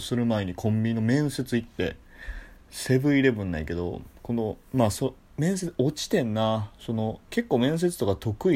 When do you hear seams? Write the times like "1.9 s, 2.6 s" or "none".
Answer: 2.6 s, 7.2 s